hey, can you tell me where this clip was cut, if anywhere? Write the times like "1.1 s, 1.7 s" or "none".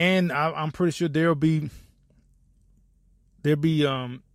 none